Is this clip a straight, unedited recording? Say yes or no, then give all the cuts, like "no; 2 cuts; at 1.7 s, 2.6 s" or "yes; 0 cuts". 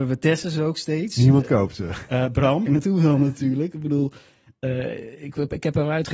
no; 1 cut; at 2.7 s